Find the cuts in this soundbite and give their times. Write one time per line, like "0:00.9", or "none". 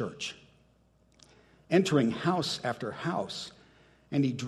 none